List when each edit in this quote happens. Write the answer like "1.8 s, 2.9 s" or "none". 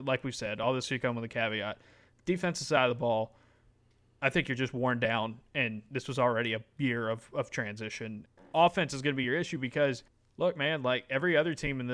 none